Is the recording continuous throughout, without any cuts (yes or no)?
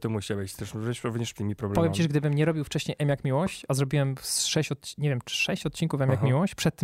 no